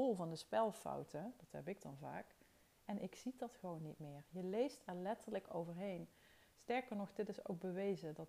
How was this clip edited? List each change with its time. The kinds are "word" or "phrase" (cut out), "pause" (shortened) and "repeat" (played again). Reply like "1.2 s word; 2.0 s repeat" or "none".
none